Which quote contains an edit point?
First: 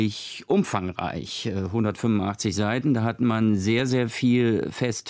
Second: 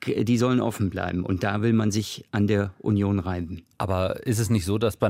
second; 1 cut; at 3.7 s

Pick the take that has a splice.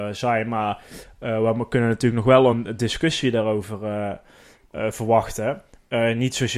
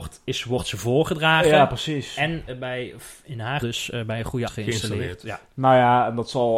second; 3 cuts; at 2.5 s, 3.6 s, 4.5 s

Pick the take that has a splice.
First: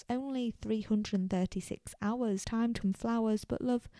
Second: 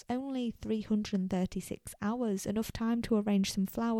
first; 2 cuts; at 2.4 s, 2.8 s

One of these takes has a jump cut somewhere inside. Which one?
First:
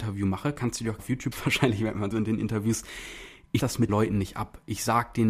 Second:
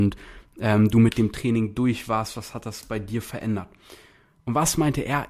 first; 5 cuts; at 1.0 s, 1.3 s, 2.1 s, 3.6 s, 3.9 s

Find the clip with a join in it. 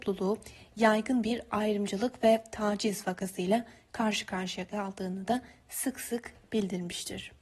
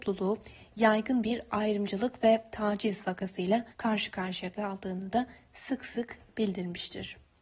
second; 1 cut; at 3.7 s

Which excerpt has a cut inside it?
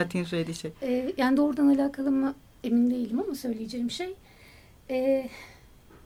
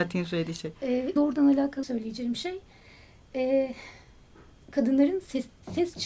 second; 3 cuts; at 1.2 s, 1.8 s, 4.6 s

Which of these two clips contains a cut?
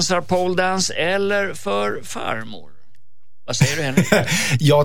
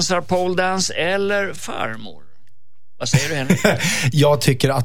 second; 1 cut; at 1.6 s

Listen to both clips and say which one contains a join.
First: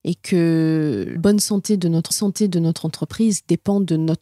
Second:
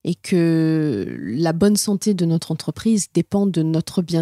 first; 2 cuts; at 1.2 s, 2.1 s

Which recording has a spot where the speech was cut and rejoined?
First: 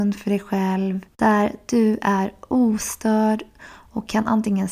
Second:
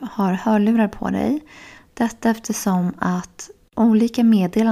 first; 1 cut; at 1.1 s

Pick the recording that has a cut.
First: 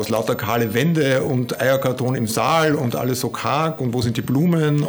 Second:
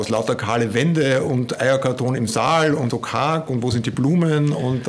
second; 1 cut; at 2.9 s

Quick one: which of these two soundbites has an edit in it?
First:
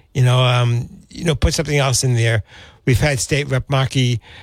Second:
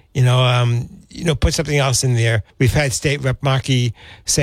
second; 1 cut; at 2.5 s

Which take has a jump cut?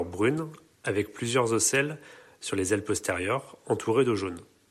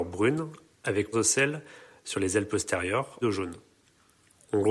second; 2 cuts; at 1.1 s, 3.2 s

